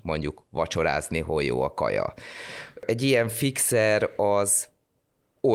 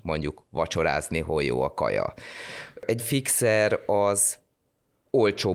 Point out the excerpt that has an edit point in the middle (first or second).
second